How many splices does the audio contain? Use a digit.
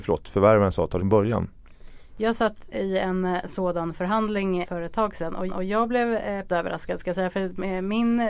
4